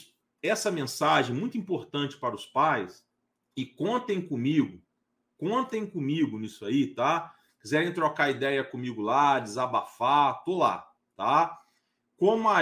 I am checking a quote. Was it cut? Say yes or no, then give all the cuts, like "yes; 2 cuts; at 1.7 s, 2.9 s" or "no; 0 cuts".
no; 0 cuts